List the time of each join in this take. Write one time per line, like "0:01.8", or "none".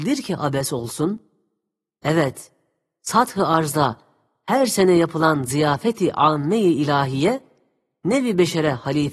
none